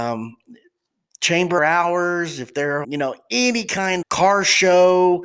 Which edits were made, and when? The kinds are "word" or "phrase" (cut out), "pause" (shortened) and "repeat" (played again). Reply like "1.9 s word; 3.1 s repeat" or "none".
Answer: 1.6 s word; 2.8 s word; 4.0 s word